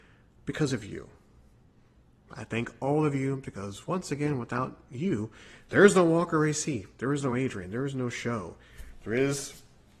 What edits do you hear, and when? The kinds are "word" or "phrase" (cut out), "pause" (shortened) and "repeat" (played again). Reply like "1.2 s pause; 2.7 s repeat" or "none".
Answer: none